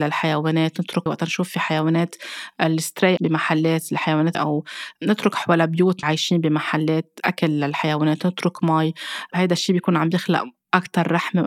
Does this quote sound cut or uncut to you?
cut